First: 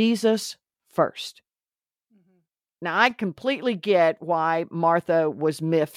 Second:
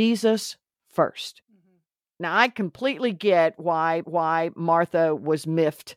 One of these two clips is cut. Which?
second; 2 cuts; at 1.4 s, 4.0 s

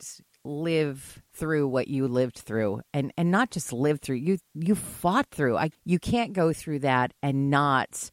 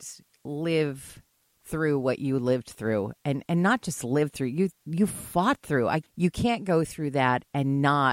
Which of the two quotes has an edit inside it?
first; 1 cut; at 1.3 s

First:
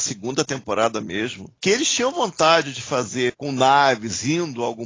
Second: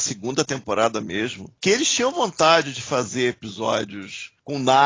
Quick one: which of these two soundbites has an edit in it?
first; 1 cut; at 3.3 s

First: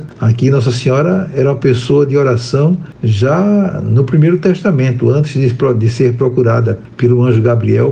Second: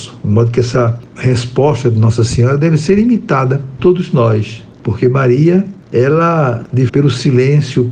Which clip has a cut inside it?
second; 2 cuts; at 3.8 s, 6.9 s

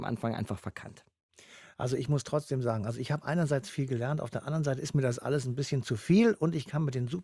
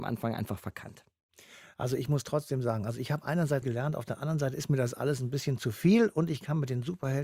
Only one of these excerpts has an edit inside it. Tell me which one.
second; 1 cut; at 3.6 s

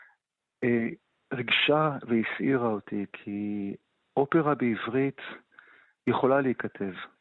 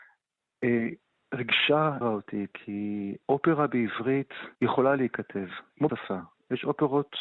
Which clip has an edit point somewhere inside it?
second; 4 cuts; at 2.0 s, 3.2 s, 4.6 s, 5.9 s

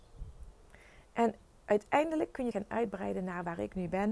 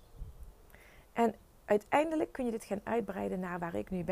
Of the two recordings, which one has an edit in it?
first; 1 cut; at 2.5 s

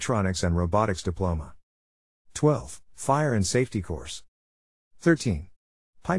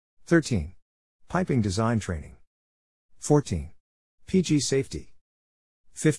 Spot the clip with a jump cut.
first; 1 cut; at 2.8 s

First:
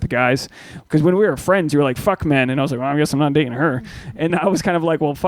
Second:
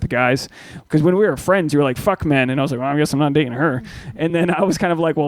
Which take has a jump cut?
first; 1 cut; at 4.3 s

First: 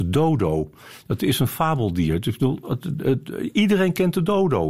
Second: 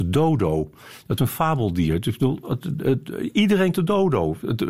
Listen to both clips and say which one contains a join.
second; 2 cuts; at 1.2 s, 3.7 s

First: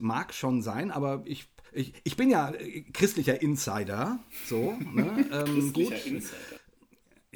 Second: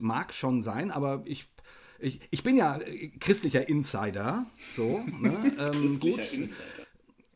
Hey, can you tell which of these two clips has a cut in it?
first; 1 cut; at 1.7 s

